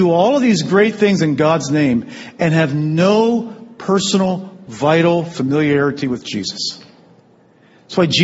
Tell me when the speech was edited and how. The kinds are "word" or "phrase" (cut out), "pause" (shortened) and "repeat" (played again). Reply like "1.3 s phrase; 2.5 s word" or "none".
none